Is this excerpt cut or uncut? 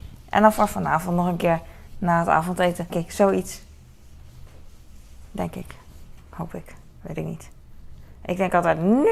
cut